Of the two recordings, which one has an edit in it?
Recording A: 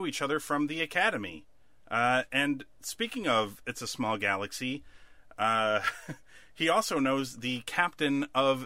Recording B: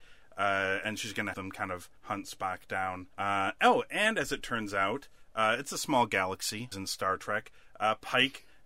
B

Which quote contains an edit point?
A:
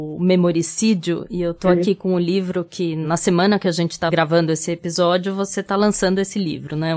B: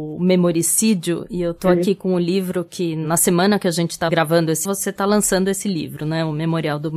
B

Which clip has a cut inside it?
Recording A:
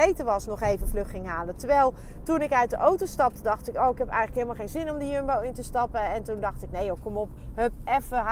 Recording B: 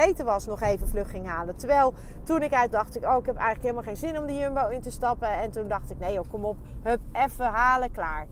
B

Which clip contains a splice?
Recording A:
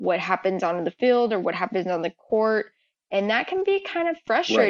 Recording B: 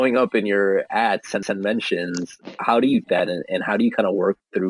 B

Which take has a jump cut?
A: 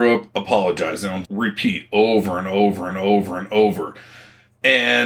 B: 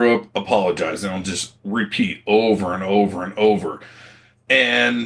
A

